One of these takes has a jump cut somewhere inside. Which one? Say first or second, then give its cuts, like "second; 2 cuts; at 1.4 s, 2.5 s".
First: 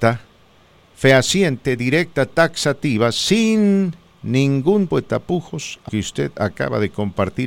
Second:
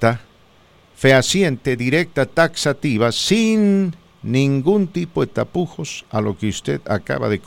first; 2 cuts; at 4.9 s, 5.9 s